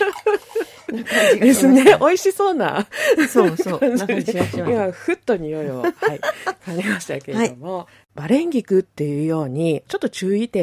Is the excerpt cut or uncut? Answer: cut